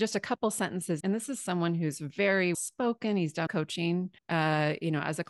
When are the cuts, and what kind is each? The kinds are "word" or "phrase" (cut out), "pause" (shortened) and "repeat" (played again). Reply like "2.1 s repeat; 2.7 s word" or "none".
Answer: 1.0 s word; 2.5 s word; 3.5 s phrase; 4.2 s pause